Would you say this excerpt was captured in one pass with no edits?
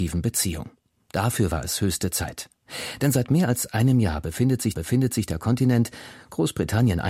no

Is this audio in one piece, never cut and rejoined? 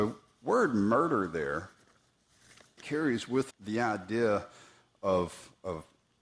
no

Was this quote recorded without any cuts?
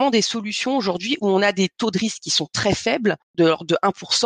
yes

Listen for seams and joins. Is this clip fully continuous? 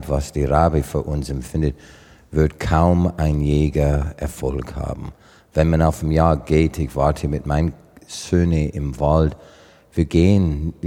yes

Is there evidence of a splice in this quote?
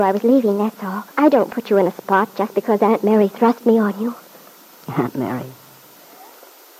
yes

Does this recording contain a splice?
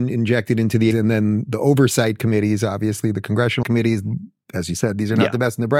yes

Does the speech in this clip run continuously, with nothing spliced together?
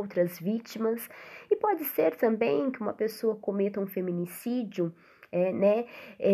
yes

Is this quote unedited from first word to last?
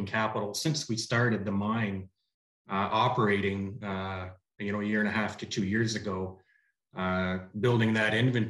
yes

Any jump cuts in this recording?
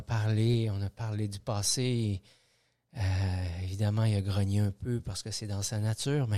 no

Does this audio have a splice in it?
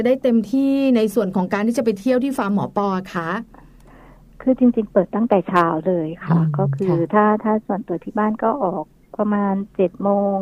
no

